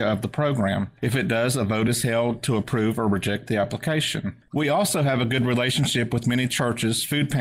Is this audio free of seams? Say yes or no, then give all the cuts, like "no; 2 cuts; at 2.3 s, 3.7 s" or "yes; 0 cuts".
yes; 0 cuts